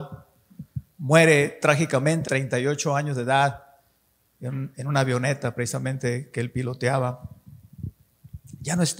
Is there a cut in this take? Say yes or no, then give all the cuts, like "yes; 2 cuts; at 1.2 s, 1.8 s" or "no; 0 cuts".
yes; 1 cut; at 2.3 s